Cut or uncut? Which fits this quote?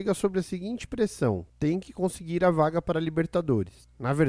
cut